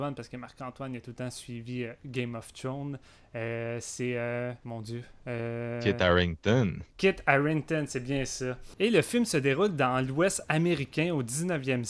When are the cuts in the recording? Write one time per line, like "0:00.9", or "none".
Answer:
0:04.6

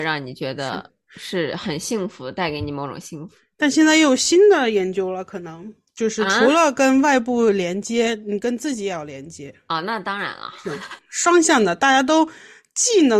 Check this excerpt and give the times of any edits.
none

